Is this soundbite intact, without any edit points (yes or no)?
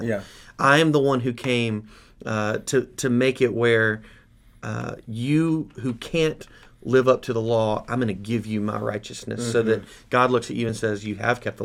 yes